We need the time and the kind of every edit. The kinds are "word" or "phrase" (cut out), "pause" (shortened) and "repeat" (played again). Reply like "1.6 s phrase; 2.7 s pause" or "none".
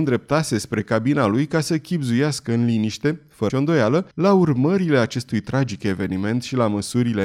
3.5 s word; 4.1 s pause